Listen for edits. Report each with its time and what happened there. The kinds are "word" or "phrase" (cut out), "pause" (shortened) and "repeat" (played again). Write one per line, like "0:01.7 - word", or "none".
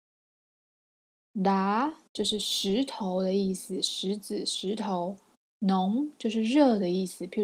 none